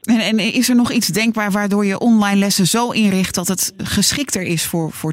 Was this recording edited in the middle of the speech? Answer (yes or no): no